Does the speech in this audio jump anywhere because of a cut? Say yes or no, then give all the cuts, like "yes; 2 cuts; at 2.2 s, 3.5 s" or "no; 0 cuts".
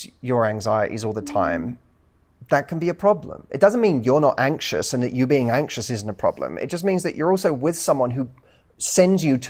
no; 0 cuts